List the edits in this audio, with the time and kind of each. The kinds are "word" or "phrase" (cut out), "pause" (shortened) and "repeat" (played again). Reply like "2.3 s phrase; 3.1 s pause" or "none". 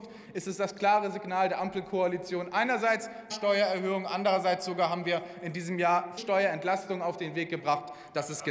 3.3 s word; 6.2 s word